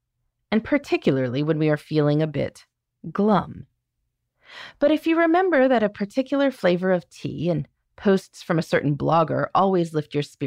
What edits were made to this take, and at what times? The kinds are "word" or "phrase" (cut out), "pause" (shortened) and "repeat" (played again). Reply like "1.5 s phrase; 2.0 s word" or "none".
none